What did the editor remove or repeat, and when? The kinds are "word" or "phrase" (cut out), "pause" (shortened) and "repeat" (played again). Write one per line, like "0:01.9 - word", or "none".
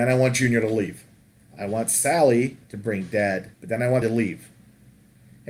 0:01.2 - pause
0:02.6 - pause
0:03.5 - pause
0:04.0 - word